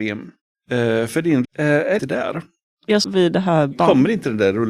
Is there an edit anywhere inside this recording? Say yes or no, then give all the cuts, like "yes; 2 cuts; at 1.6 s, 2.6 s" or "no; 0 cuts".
yes; 3 cuts; at 1.4 s, 2.0 s, 3.0 s